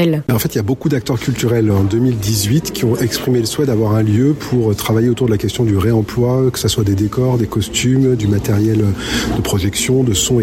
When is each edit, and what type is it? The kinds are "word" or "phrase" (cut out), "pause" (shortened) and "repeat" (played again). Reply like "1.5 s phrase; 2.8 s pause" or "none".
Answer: 1.7 s word

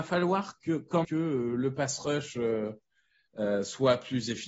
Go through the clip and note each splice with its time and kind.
1.0 s word

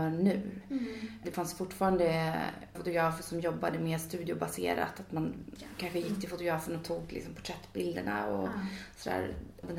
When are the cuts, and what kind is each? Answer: 2.7 s word; 5.6 s word

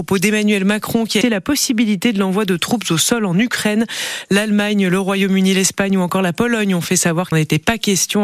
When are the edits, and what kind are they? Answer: 1.2 s word; 7.3 s phrase

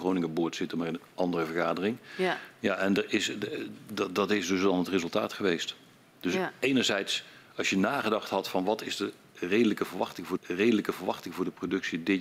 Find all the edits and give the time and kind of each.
10.4 s repeat

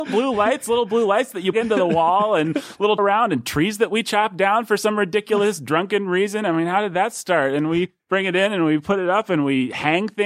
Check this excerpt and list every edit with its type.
1.5 s word; 3.0 s phrase

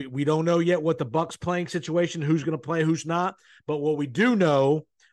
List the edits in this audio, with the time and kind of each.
none

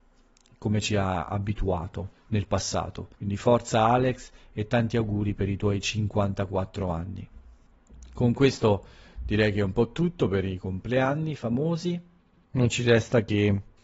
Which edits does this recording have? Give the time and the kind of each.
3.1 s pause

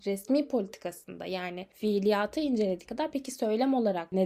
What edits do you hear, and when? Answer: 2.9 s word

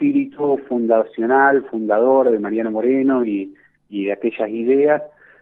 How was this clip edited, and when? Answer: none

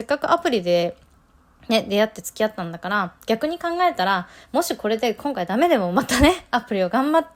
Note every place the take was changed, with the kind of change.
none

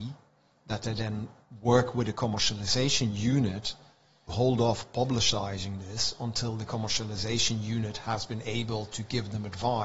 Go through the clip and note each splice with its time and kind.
4.3 s word

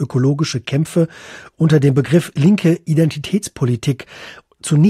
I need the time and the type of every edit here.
none

